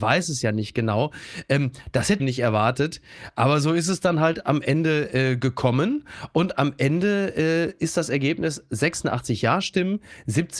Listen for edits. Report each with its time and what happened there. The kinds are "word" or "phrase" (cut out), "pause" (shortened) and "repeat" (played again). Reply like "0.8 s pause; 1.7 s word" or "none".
2.2 s phrase